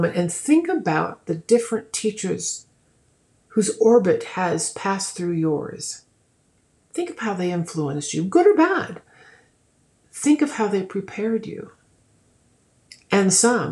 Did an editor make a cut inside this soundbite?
no; 0 cuts

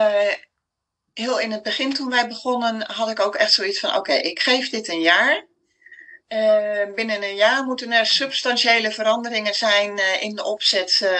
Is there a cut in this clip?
yes; 1 cut; at 6.2 s

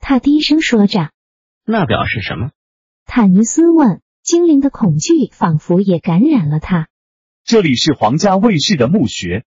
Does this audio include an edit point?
no; 0 cuts

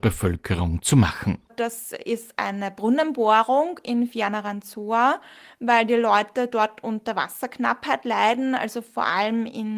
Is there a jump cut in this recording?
no; 0 cuts

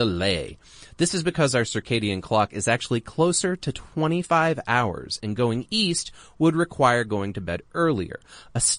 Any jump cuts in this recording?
no; 0 cuts

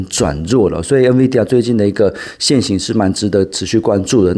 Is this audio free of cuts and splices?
yes; 0 cuts

